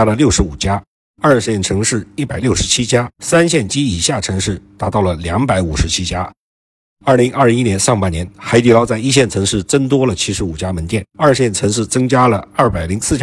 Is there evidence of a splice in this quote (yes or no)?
yes